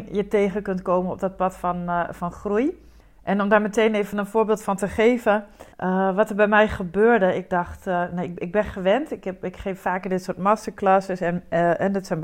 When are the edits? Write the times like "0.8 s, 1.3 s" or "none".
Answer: 5.7 s

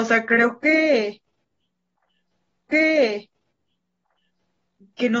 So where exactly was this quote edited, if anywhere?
2.7 s

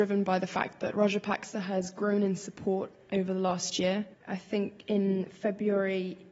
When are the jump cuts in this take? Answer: 4.1 s

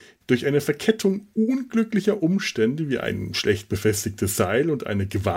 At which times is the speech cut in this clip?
none

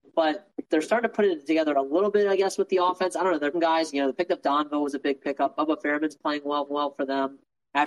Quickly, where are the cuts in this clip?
3.5 s, 6.7 s

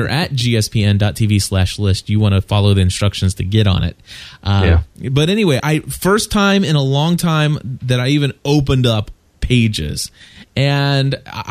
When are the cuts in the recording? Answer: 5.6 s

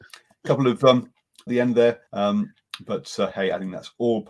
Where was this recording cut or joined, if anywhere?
1.5 s, 2.1 s

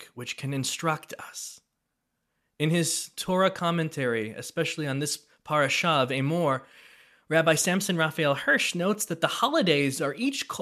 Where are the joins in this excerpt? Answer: none

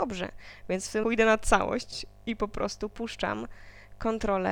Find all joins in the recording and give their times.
1.0 s

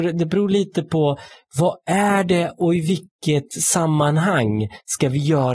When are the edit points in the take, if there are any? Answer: none

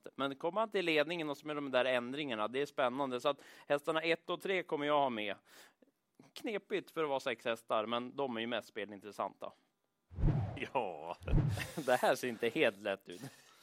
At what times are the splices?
none

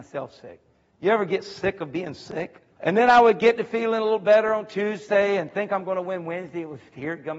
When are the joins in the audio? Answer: 2.7 s

